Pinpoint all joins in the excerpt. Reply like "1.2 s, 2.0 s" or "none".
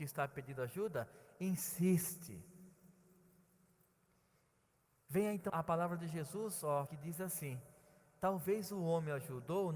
5.5 s, 6.9 s

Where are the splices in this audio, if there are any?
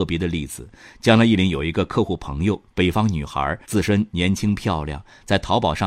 3.6 s

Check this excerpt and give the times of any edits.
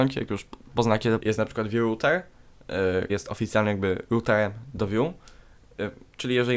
1.2 s, 3.1 s

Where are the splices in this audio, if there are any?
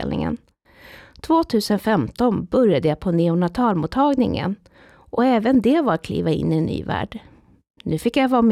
none

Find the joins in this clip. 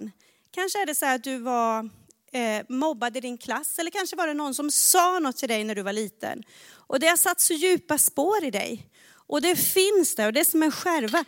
none

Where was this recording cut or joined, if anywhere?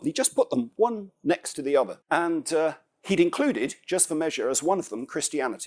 2.0 s

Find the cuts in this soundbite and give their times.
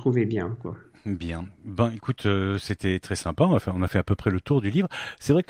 none

